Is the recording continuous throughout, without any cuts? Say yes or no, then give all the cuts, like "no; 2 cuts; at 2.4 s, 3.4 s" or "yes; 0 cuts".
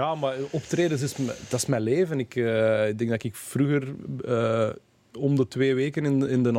yes; 0 cuts